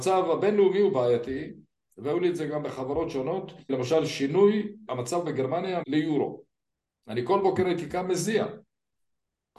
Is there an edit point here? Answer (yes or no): yes